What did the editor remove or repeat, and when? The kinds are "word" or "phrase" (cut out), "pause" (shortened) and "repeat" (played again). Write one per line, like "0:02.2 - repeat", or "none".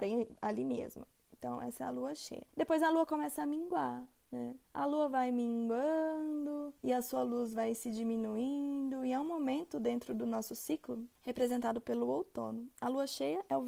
0:02.5 - pause
0:04.6 - pause
0:06.8 - pause
0:11.2 - pause